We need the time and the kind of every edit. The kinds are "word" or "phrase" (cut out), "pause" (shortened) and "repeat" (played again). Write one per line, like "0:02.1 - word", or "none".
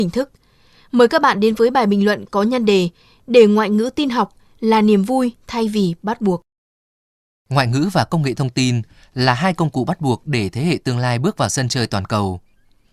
none